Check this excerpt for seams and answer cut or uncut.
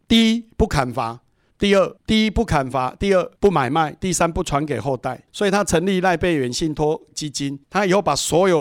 cut